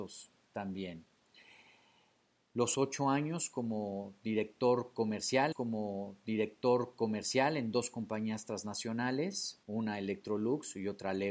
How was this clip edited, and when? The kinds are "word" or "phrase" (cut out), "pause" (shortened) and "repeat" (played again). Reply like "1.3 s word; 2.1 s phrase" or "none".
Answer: 2.7 s word; 5.5 s repeat; 9.6 s pause